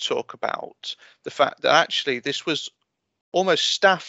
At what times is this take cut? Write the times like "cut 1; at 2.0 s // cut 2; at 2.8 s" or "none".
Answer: none